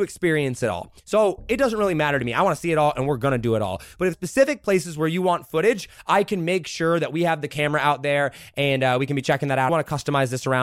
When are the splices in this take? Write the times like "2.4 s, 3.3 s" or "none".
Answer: 4.1 s, 9.7 s